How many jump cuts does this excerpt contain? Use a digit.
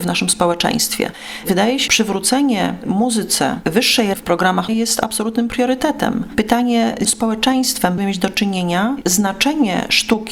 6